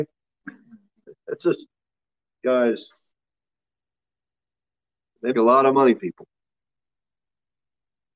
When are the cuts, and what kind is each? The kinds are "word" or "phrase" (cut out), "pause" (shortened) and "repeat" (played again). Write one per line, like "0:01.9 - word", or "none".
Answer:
0:02.4 - word
0:05.3 - word
0:06.0 - word